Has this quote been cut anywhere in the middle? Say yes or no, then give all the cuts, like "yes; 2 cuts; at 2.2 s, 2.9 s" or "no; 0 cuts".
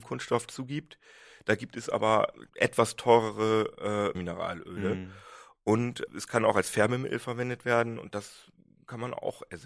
yes; 3 cuts; at 2.5 s, 4.1 s, 6.1 s